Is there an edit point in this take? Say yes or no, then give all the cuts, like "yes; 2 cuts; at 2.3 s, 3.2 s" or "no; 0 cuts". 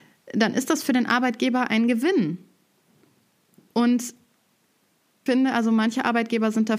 yes; 1 cut; at 5.3 s